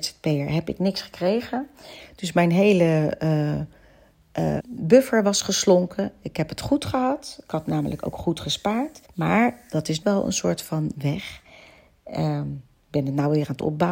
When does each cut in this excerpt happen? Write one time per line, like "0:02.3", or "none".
0:04.6
0:09.0
0:10.0